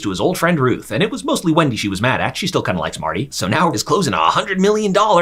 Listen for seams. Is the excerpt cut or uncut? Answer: cut